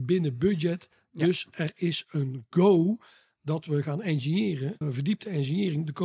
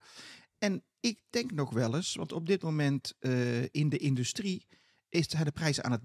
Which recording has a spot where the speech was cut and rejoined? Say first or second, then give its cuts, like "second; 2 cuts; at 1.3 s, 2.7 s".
first; 1 cut; at 4.8 s